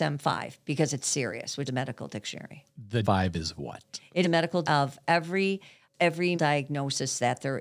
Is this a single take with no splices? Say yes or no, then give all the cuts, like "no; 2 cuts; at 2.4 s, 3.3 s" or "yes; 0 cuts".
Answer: no; 6 cuts; at 1.0 s, 1.7 s, 3.0 s, 4.2 s, 4.6 s, 6.3 s